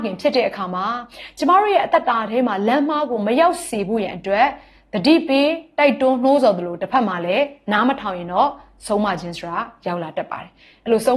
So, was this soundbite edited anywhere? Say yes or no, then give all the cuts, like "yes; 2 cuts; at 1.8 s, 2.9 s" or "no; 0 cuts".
no; 0 cuts